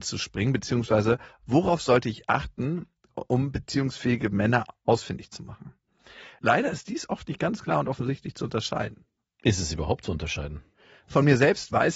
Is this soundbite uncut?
yes; 0 cuts

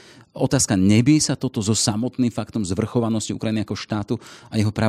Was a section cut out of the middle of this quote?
no; 0 cuts

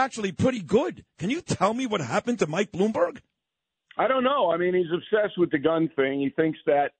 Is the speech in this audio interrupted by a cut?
no; 0 cuts

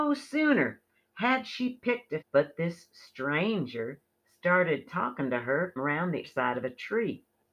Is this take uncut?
no; 3 cuts; at 2.2 s, 5.8 s, 6.2 s

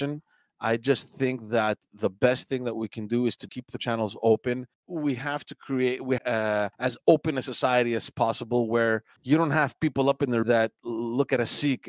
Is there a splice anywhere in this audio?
yes; 7 cuts; at 3.5 s, 3.8 s, 4.7 s, 6.2 s, 6.7 s, 9.2 s, 10.4 s

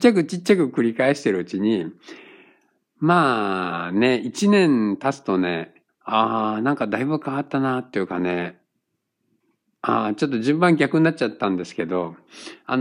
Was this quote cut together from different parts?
yes; 1 cut; at 5.9 s

